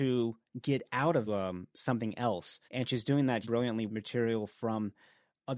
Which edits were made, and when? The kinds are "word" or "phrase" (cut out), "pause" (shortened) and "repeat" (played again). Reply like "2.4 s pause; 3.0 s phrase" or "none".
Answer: 1.3 s phrase; 2.6 s pause; 3.4 s word; 3.9 s word